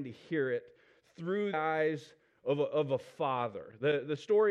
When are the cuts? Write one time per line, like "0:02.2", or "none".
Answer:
0:01.5